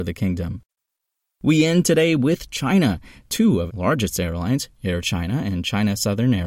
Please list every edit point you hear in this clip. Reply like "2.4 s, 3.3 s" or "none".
3.7 s